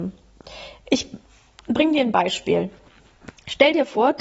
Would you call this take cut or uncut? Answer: uncut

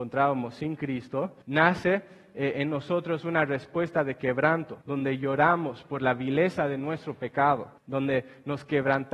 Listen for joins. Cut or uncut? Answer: cut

